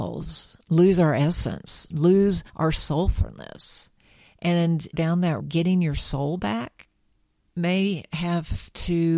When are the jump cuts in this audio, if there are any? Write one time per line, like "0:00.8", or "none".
0:02.5
0:04.9
0:05.4